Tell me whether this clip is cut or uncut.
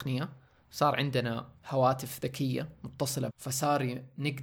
cut